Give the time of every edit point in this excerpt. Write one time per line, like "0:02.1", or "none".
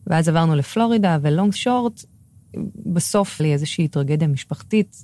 0:01.5
0:03.4